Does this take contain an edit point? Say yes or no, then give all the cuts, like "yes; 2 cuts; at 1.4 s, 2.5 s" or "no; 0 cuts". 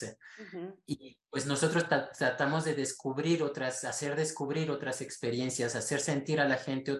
no; 0 cuts